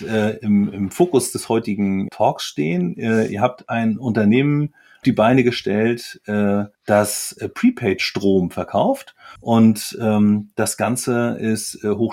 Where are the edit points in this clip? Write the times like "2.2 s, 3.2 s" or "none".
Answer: 2.1 s, 5.0 s, 6.7 s, 9.4 s